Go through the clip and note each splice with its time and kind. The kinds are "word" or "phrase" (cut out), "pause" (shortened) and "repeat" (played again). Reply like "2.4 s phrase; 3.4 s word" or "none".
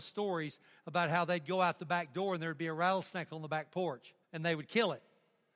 4.2 s pause